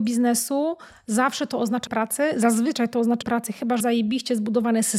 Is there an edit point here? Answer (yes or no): yes